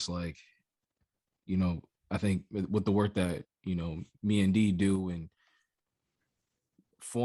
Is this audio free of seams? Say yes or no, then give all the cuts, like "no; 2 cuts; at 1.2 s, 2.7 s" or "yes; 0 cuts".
yes; 0 cuts